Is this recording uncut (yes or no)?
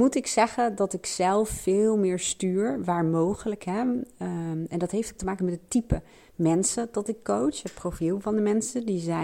yes